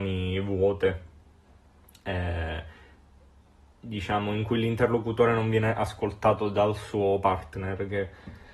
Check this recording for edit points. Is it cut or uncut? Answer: uncut